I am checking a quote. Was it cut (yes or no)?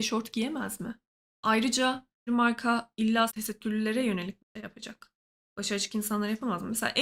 yes